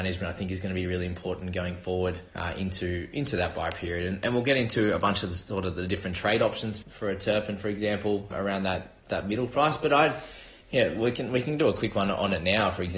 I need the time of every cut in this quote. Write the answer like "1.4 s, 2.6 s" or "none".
2.3 s, 6.8 s, 8.3 s, 9.0 s, 10.6 s